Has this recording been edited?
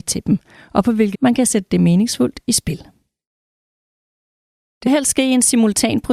yes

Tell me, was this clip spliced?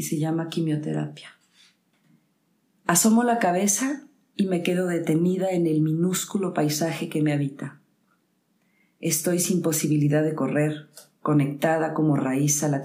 no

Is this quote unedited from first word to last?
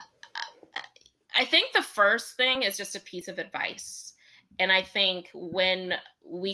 yes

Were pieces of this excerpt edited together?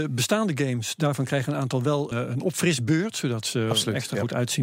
yes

